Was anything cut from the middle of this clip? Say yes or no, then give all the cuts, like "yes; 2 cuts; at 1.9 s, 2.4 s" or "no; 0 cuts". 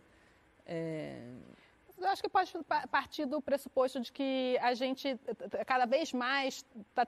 no; 0 cuts